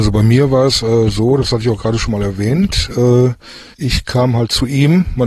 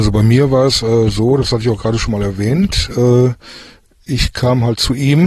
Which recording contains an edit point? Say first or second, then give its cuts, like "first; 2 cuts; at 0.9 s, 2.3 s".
first; 1 cut; at 3.7 s